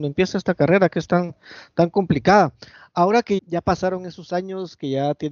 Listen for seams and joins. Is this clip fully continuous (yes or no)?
no